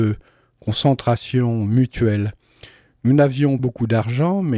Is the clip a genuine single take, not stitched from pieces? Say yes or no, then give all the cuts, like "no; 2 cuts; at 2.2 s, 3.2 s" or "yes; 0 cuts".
no; 1 cut; at 3.6 s